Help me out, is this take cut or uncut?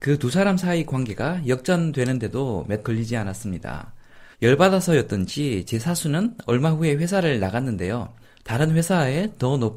cut